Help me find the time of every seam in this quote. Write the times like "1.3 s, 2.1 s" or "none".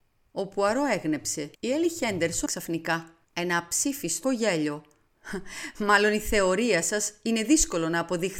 1.5 s, 2.5 s, 3.2 s, 4.2 s